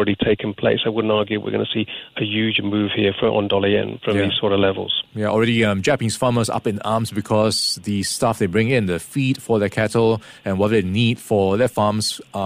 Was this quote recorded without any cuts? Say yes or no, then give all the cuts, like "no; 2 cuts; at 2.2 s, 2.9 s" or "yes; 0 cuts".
yes; 0 cuts